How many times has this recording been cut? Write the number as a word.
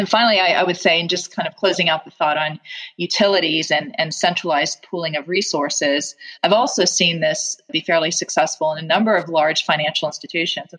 one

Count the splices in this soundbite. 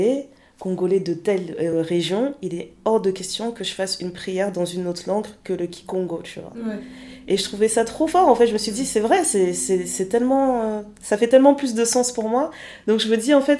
zero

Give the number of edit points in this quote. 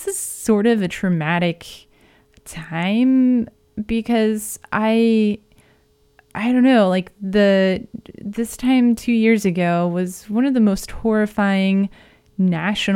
zero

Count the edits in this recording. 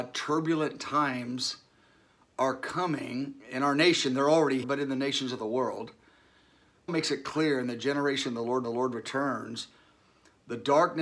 four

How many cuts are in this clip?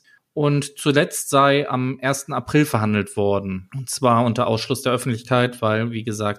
zero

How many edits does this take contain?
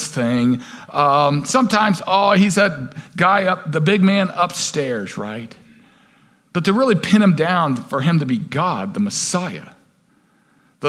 zero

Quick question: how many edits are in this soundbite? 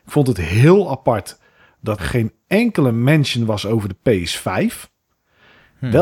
one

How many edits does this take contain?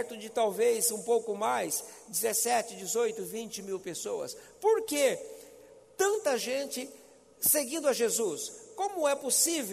zero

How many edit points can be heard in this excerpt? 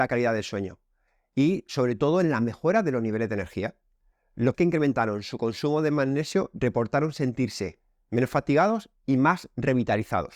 one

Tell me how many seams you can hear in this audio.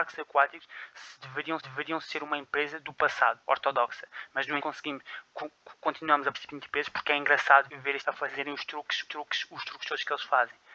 seven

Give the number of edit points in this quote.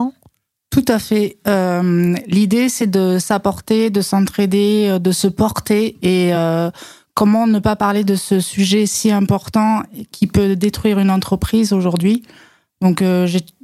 zero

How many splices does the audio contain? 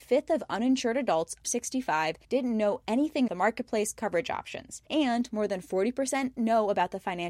five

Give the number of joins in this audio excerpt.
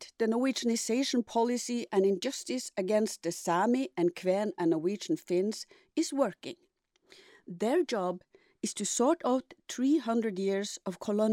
zero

